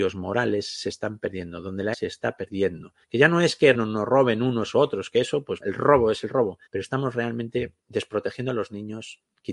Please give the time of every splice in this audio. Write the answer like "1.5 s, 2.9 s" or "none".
1.9 s, 3.0 s, 3.7 s, 5.6 s, 6.7 s, 7.8 s